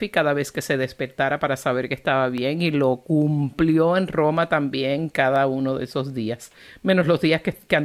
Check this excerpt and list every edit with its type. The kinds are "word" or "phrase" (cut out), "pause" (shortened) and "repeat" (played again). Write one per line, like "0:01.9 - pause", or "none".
none